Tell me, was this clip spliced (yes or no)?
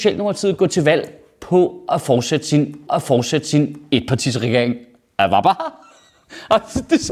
yes